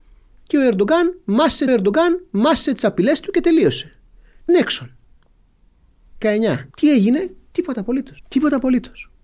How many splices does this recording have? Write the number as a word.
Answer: five